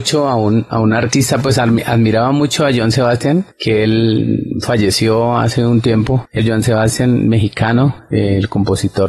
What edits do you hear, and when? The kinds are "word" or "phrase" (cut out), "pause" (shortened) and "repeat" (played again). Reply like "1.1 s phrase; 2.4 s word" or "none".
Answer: 6.4 s word